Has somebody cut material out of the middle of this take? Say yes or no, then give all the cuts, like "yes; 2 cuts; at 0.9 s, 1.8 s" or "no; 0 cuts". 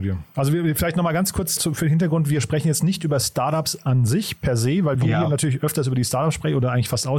yes; 2 cuts; at 1.6 s, 4.9 s